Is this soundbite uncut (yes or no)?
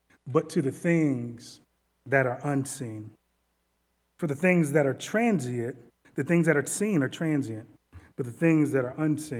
yes